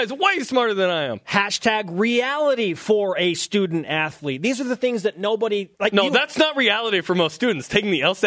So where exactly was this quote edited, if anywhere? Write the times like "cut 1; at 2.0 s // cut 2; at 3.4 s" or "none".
cut 1; at 5.7 s